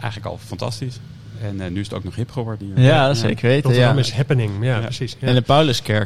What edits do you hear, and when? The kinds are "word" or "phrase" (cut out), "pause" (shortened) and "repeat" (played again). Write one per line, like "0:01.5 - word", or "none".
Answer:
none